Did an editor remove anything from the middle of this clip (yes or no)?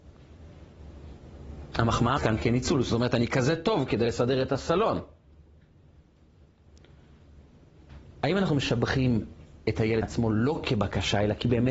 yes